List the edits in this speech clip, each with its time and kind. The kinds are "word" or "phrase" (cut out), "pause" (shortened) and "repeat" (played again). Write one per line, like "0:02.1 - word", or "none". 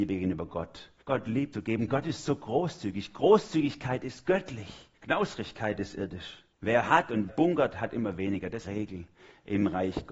0:01.0 - pause
0:01.5 - word
0:05.0 - pause
0:06.5 - pause
0:07.3 - word
0:08.6 - phrase